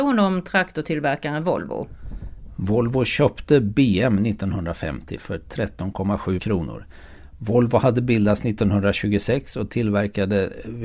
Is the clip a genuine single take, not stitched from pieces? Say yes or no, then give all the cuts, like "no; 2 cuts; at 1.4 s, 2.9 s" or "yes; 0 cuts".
no; 1 cut; at 6.4 s